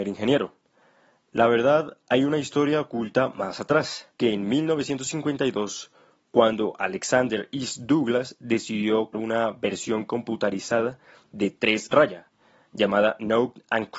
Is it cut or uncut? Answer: cut